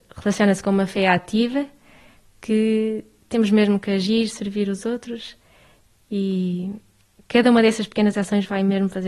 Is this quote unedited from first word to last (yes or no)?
yes